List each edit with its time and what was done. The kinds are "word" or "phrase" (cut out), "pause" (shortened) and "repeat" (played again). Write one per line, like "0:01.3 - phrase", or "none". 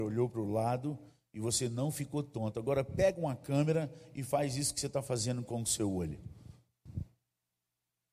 none

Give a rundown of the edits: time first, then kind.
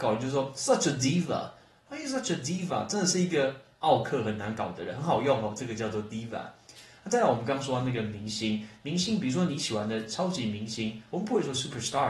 none

